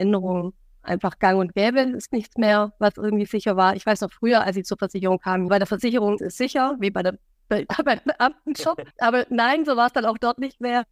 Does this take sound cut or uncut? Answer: cut